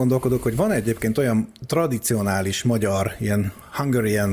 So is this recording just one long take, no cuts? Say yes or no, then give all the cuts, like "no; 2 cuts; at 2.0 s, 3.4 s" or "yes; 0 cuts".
yes; 0 cuts